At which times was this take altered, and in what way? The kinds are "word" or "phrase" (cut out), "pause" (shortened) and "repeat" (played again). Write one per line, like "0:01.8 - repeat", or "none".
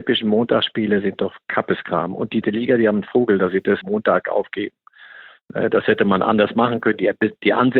0:02.4 - word
0:03.8 - word